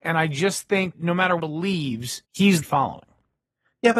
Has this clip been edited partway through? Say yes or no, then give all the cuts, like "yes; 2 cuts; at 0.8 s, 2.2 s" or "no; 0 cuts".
yes; 4 cuts; at 0.9 s, 1.4 s, 2.2 s, 2.6 s